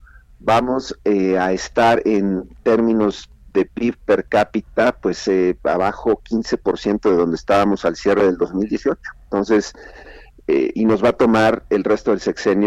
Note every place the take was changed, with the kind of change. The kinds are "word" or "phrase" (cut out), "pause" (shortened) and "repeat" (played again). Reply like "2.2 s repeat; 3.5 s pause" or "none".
none